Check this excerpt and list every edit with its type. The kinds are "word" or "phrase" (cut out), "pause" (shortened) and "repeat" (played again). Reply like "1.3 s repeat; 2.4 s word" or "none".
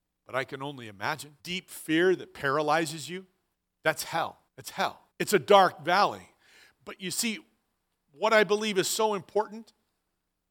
1.4 s pause; 3.5 s pause; 4.5 s pause; 5.1 s pause